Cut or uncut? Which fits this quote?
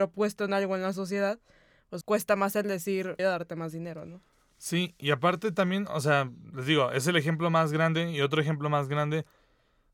cut